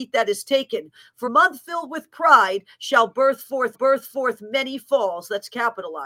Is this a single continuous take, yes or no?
no